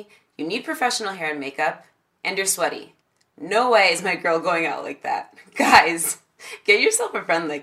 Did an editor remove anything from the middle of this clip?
no; 0 cuts

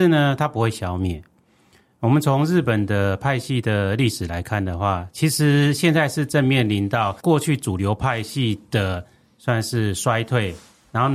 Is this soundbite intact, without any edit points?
no; 1 cut; at 7.2 s

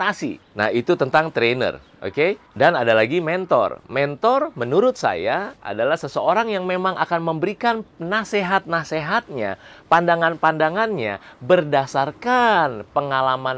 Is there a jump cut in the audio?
no; 0 cuts

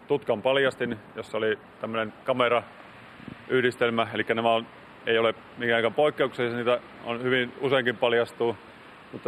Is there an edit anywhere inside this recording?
no; 0 cuts

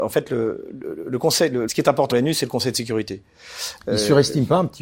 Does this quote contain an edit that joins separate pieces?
yes; 2 cuts; at 1.7 s, 2.1 s

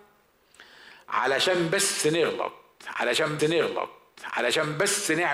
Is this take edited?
yes; 1 cut; at 3.4 s

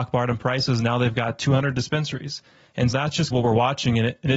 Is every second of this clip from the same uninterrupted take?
no; 2 cuts; at 2.9 s, 3.3 s

